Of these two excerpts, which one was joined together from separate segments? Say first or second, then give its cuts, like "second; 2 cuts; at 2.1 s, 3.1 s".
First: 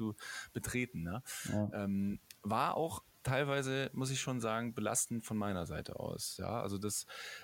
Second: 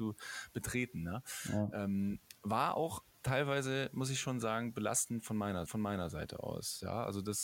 second; 1 cut; at 5.7 s